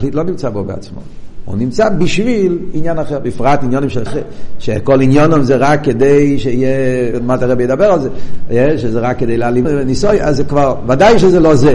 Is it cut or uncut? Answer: cut